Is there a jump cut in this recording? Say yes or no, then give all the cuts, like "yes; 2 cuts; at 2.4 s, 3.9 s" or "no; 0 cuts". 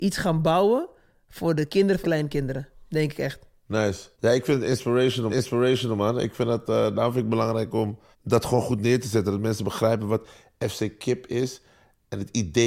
yes; 4 cuts; at 2.0 s, 4.1 s, 5.3 s, 8.1 s